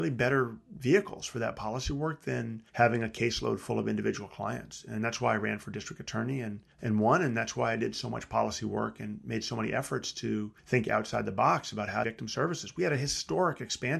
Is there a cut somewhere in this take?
yes; 4 cuts; at 2.7 s, 6.7 s, 10.6 s, 12.0 s

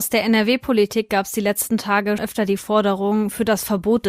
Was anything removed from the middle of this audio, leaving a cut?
yes; 1 cut; at 2.2 s

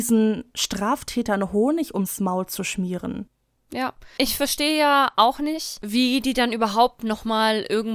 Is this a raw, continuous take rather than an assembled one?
no; 1 cut; at 4.2 s

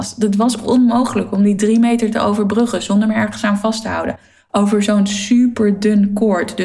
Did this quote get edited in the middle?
no; 0 cuts

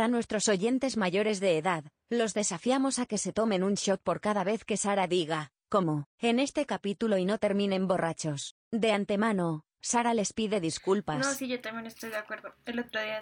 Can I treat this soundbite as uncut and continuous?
no; 2 cuts; at 6.1 s, 8.6 s

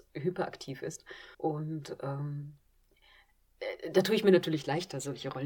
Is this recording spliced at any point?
yes; 1 cut; at 1.3 s

